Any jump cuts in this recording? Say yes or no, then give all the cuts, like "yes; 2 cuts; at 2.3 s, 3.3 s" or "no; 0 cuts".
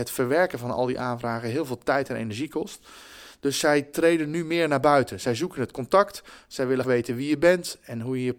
yes; 1 cut; at 6.8 s